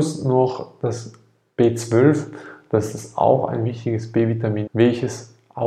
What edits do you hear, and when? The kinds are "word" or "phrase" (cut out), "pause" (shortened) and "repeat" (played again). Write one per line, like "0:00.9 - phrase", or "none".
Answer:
0:04.7 - word